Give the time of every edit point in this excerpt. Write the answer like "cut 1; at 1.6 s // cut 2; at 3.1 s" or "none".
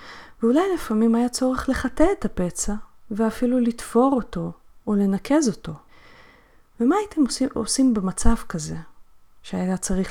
none